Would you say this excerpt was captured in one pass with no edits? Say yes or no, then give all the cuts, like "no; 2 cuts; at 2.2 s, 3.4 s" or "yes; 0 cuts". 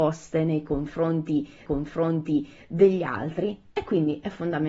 no; 1 cut; at 1.7 s